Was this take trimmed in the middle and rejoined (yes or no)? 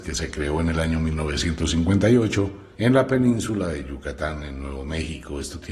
yes